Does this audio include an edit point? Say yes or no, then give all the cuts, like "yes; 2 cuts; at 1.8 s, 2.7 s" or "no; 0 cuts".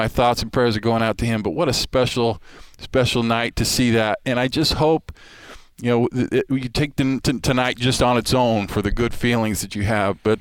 no; 0 cuts